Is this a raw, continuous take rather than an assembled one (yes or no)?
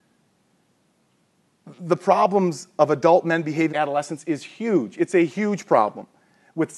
no